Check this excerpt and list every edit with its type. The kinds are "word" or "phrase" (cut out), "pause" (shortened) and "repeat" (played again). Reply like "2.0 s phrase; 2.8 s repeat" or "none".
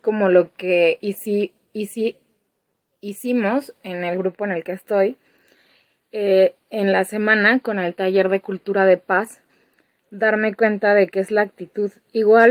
none